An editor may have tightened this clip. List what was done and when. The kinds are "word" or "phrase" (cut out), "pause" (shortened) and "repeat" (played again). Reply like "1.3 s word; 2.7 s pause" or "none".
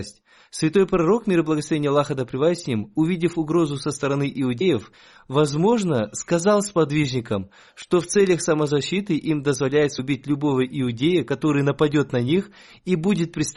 none